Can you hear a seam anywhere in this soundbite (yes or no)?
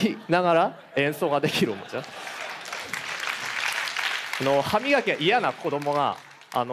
no